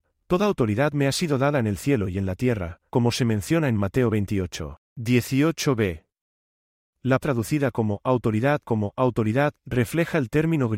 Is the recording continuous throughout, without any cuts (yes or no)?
no